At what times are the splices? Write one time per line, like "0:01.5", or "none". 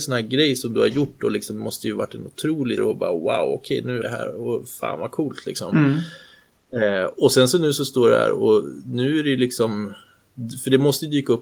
0:02.8
0:04.0